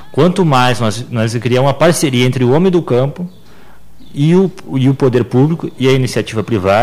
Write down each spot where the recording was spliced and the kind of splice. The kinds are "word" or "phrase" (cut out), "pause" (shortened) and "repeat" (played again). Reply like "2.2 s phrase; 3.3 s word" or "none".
none